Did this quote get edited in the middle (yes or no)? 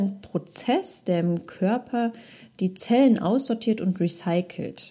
no